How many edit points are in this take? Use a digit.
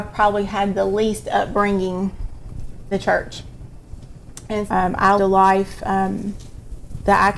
3